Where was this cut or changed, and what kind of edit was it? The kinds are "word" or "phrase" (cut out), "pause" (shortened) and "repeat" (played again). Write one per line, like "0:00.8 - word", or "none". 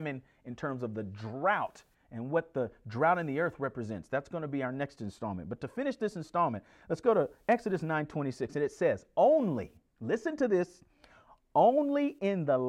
none